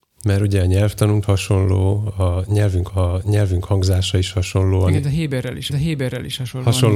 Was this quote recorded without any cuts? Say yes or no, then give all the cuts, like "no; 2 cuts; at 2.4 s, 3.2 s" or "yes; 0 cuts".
no; 3 cuts; at 1.2 s, 2.9 s, 5.7 s